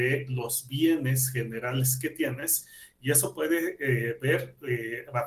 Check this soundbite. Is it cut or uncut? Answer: uncut